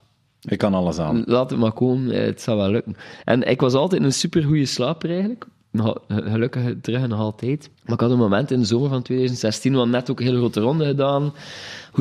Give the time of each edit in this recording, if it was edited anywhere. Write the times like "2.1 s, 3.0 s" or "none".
7.7 s